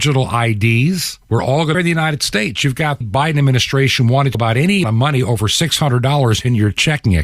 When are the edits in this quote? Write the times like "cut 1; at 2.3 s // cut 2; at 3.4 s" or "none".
cut 1; at 1.2 s // cut 2; at 1.7 s // cut 3; at 3.0 s // cut 4; at 4.3 s // cut 5; at 4.8 s